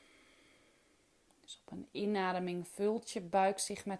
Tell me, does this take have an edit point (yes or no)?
no